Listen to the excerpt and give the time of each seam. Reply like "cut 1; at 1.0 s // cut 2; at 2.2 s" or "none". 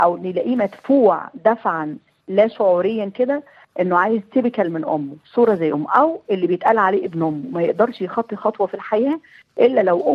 none